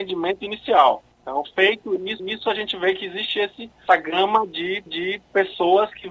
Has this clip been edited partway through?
yes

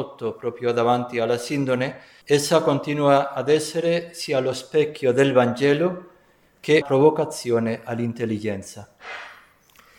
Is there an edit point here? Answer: yes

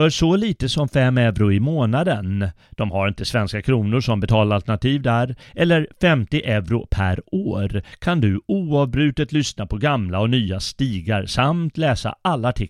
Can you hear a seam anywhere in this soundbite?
no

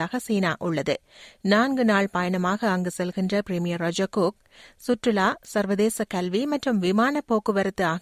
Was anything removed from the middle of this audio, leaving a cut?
no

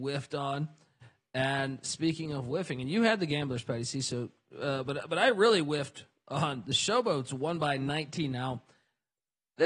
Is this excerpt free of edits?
yes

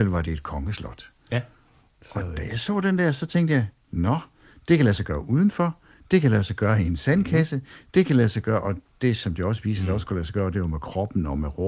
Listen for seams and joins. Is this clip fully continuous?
yes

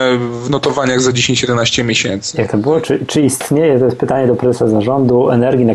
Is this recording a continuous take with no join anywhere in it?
yes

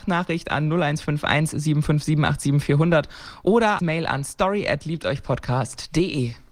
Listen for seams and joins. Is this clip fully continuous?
no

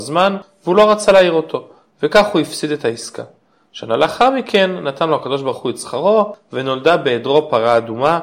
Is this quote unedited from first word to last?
yes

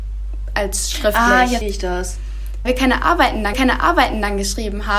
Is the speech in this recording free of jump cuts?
no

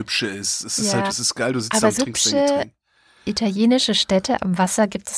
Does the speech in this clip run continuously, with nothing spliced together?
no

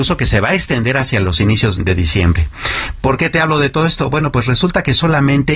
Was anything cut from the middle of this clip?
yes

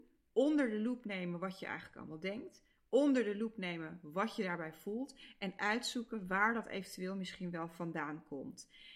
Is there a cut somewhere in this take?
no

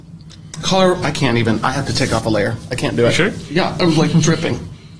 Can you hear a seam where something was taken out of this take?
no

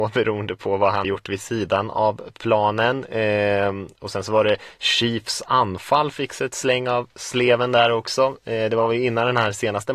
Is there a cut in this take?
yes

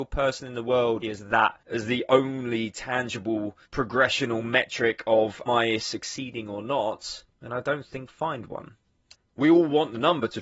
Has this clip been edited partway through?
yes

